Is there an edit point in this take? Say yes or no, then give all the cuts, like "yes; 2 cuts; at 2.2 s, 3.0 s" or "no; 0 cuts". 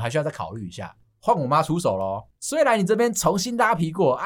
yes; 2 cuts; at 1.0 s, 2.3 s